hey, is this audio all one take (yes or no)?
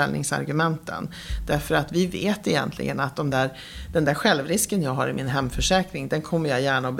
yes